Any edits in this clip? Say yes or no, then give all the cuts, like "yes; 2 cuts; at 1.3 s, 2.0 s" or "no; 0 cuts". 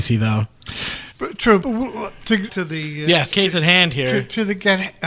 yes; 4 cuts; at 1.1 s, 1.6 s, 2.5 s, 3.3 s